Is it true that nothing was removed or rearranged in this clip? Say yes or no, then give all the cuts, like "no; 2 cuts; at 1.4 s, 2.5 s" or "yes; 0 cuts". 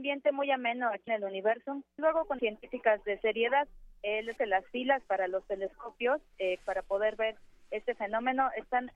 no; 5 cuts; at 1.1 s, 2.0 s, 2.4 s, 4.4 s, 6.6 s